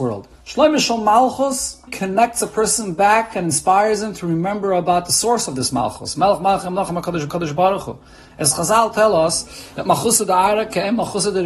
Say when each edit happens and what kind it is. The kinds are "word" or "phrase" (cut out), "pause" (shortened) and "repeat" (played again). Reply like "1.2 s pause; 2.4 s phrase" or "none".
1.9 s word; 7.3 s repeat